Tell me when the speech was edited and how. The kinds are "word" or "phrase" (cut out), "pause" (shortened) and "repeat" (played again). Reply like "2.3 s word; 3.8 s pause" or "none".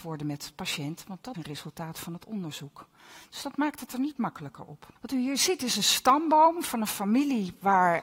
1.3 s word; 5.0 s pause